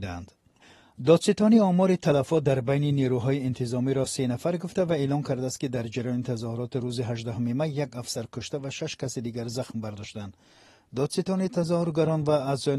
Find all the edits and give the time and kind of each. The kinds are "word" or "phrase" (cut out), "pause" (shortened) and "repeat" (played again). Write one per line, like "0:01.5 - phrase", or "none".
none